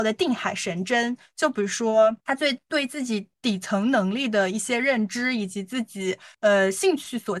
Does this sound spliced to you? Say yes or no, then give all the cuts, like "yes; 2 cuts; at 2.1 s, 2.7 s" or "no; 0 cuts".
yes; 2 cuts; at 2.2 s, 6.3 s